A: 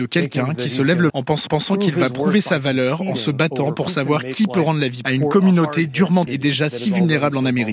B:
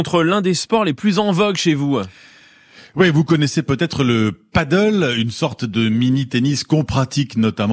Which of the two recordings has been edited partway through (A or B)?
A